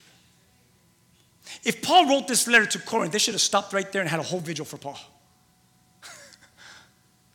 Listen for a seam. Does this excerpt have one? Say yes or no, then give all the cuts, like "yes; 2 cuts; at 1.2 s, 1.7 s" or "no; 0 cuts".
no; 0 cuts